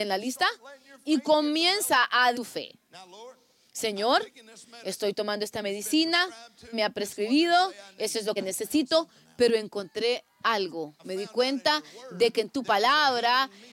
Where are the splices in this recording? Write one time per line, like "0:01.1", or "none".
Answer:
0:02.3
0:06.7
0:08.4
0:11.0